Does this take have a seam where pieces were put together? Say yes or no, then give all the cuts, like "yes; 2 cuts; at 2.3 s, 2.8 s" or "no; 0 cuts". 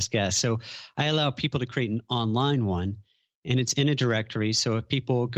no; 0 cuts